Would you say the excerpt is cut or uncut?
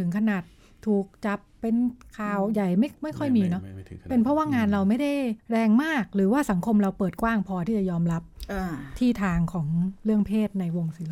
cut